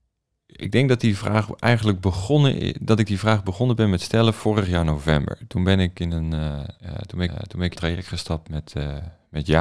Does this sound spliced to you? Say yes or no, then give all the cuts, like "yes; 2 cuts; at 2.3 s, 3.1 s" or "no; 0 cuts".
yes; 3 cuts; at 6.8 s, 7.3 s, 7.8 s